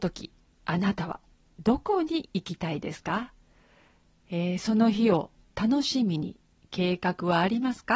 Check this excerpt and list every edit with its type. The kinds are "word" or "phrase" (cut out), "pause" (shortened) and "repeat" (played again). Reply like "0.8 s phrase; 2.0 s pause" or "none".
none